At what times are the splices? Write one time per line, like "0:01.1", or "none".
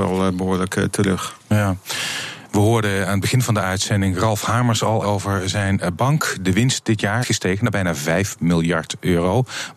0:05.0
0:07.2